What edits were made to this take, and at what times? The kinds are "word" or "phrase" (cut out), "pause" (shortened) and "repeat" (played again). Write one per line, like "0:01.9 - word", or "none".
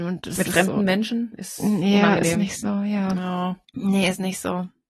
0:03.6 - pause